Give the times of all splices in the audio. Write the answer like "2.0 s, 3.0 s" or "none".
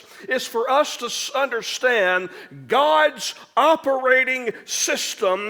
none